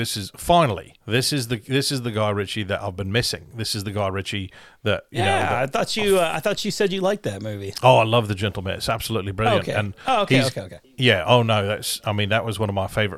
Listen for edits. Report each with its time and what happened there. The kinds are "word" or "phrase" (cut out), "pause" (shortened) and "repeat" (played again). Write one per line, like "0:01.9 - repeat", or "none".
0:01.0 - pause